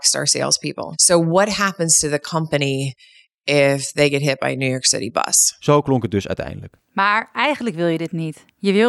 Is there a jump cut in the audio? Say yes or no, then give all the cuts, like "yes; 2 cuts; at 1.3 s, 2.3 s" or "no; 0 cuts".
no; 0 cuts